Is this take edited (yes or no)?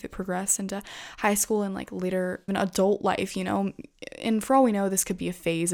yes